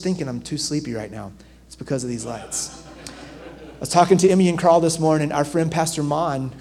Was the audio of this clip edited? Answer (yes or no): no